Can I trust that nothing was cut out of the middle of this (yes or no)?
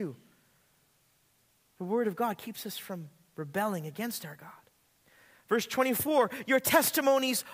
yes